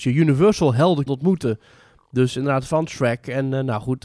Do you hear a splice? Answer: yes; 1 cut; at 1.1 s

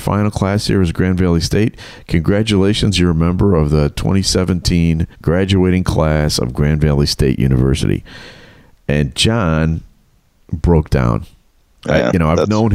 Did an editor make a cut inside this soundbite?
yes; 1 cut; at 5.1 s

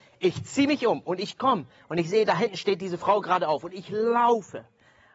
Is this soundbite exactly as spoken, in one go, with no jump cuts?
yes; 0 cuts

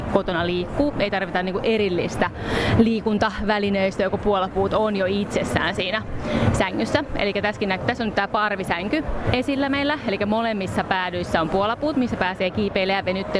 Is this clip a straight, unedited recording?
yes; 0 cuts

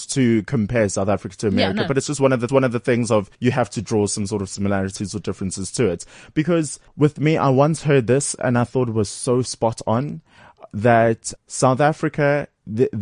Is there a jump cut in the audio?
yes; 4 cuts; at 2.5 s, 3.3 s, 6.9 s, 11.4 s

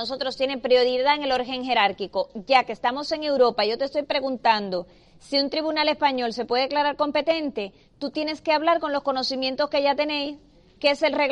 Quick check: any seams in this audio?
no; 0 cuts

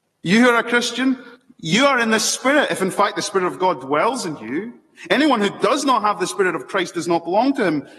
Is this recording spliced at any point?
yes; 1 cut; at 1.4 s

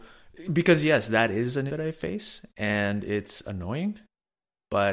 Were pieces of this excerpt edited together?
yes; 1 cut; at 1.7 s

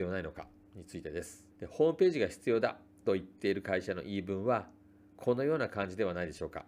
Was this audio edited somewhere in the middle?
yes; 1 cut; at 1.5 s

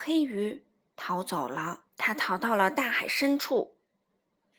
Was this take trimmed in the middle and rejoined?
yes; 1 cut; at 1.9 s

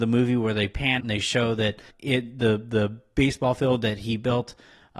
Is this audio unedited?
no; 2 cuts; at 1.0 s, 1.9 s

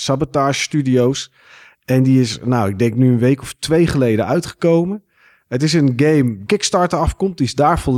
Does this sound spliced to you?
yes; 1 cut; at 6.5 s

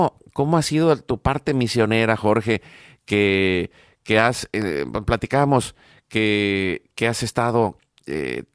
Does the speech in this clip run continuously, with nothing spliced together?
yes; 0 cuts

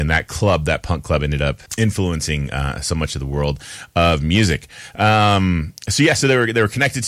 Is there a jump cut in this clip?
yes; 1 cut; at 1.7 s

